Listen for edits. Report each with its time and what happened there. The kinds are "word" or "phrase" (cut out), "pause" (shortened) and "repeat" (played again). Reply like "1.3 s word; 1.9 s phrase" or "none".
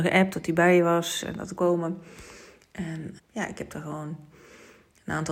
1.6 s word; 3.2 s word